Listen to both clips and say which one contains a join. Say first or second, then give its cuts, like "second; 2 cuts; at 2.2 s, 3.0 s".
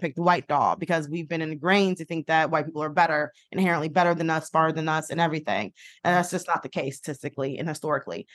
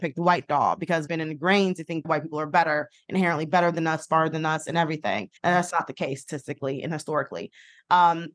second; 4 cuts; at 1.1 s, 2.0 s, 5.4 s, 5.7 s